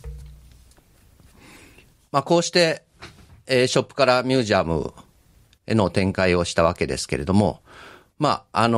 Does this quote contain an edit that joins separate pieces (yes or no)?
no